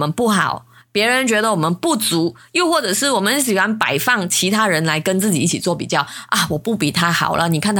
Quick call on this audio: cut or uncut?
uncut